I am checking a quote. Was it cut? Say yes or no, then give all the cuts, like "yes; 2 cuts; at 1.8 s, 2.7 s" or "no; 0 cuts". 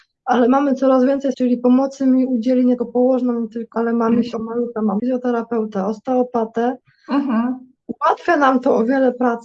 yes; 6 cuts; at 1.3 s, 2.8 s, 3.7 s, 4.3 s, 5.0 s, 7.8 s